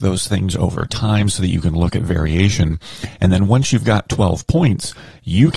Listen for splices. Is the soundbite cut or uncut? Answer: uncut